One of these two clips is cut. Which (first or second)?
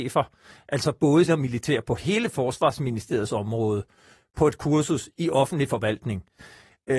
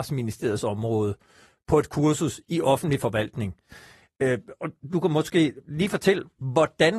first